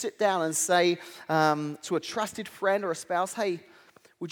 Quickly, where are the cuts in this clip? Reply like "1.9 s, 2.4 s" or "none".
none